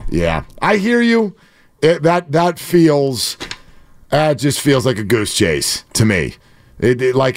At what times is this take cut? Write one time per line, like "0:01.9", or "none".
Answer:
none

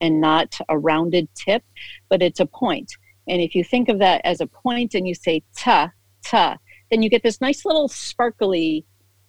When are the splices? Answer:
none

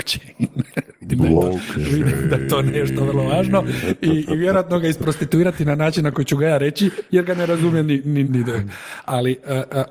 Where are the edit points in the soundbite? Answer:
0:08.3

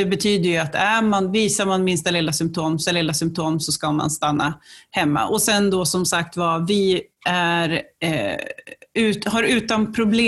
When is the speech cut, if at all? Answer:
0:02.9

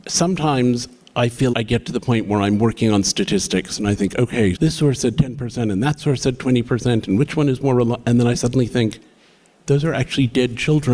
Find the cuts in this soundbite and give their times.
0:01.5
0:04.6

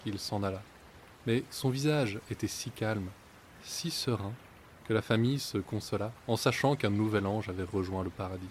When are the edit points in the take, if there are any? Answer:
0:06.2

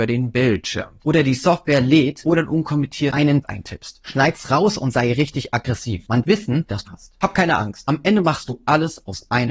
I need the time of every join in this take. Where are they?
0:01.0
0:03.4
0:06.2
0:06.9

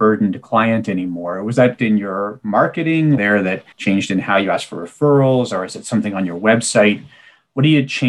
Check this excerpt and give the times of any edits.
0:01.8
0:03.2
0:03.7

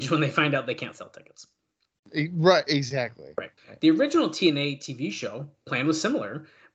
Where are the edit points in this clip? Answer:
0:03.6

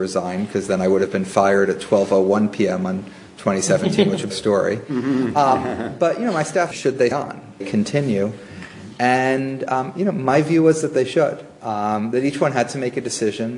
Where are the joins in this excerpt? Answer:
0:04.3
0:06.7
0:07.1
0:07.6

